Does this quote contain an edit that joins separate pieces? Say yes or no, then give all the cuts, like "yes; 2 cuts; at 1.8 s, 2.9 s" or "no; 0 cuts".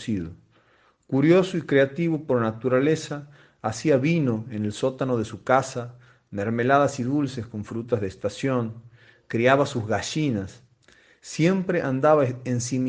no; 0 cuts